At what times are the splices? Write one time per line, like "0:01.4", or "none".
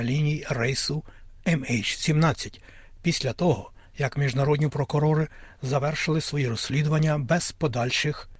none